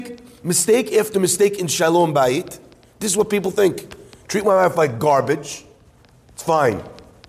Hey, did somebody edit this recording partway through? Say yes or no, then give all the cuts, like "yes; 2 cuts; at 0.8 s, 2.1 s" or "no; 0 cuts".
no; 0 cuts